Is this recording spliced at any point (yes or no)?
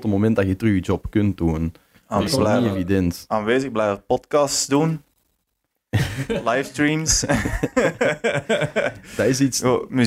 yes